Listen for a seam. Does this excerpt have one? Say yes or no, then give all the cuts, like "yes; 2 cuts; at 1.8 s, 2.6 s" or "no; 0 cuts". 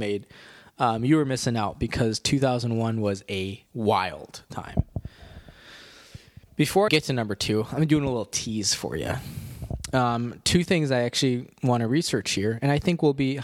yes; 2 cuts; at 3.7 s, 6.9 s